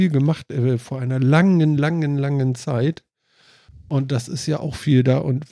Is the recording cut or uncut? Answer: uncut